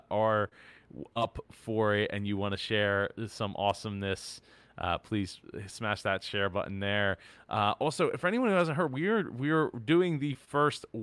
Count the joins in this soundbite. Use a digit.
0